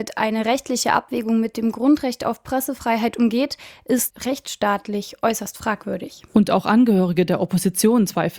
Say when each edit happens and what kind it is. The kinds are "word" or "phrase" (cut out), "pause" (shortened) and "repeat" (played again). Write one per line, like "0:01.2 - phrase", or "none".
none